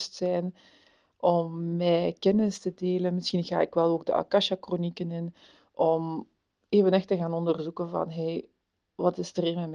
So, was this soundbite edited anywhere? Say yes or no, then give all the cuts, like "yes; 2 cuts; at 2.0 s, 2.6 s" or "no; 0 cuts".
no; 0 cuts